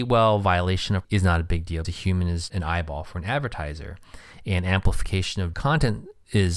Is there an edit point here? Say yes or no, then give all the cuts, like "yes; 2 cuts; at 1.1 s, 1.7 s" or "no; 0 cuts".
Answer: yes; 4 cuts; at 1.0 s, 1.8 s, 2.5 s, 5.5 s